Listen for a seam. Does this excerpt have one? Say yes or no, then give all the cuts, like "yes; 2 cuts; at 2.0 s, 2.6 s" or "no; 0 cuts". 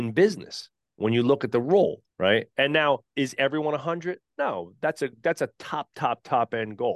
yes; 2 cuts; at 2.1 s, 3.1 s